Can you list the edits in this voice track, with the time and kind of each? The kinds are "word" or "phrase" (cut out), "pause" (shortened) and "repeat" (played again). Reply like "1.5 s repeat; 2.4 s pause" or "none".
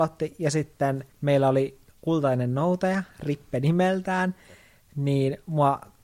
1.1 s pause